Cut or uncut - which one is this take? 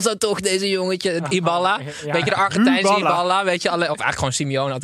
uncut